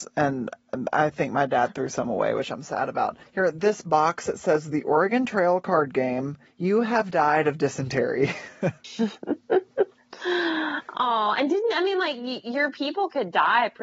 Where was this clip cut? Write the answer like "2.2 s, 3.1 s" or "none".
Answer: none